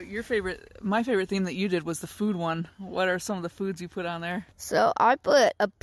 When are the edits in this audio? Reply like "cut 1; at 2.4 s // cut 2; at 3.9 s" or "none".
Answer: cut 1; at 4.5 s